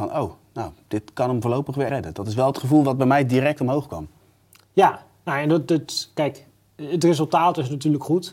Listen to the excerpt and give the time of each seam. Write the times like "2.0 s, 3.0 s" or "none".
1.9 s

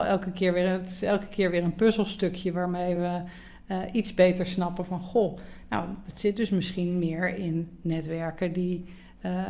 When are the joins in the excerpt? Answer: none

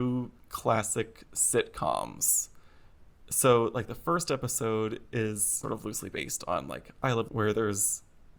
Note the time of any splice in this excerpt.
5.6 s, 7.3 s

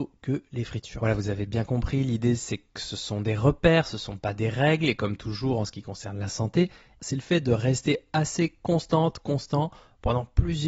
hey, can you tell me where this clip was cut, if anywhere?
none

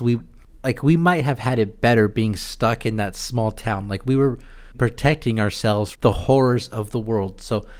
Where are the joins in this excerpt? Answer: 4.7 s, 5.9 s

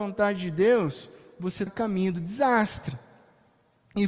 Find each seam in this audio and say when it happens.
1.7 s

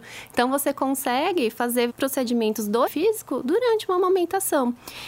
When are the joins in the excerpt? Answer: 1.9 s, 2.9 s

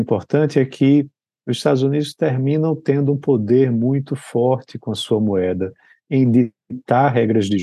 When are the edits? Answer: none

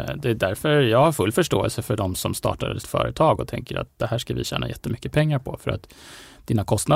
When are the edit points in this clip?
2.8 s

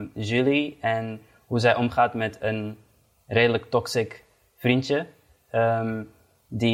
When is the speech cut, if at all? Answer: none

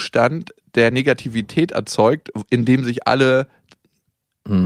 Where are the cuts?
none

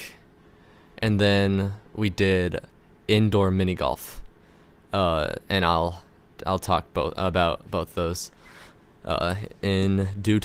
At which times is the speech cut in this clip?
1.9 s

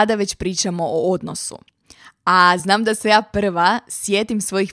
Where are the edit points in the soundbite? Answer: none

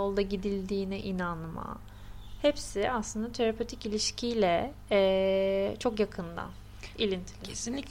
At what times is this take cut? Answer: none

